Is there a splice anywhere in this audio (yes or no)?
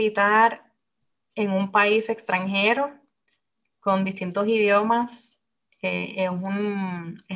no